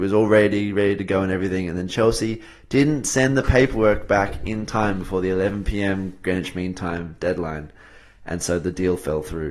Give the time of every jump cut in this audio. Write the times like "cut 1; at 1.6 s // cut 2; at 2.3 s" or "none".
none